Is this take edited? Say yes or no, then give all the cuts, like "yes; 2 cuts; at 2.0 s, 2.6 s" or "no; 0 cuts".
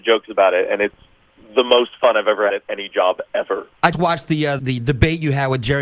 yes; 3 cuts; at 2.5 s, 3.9 s, 4.6 s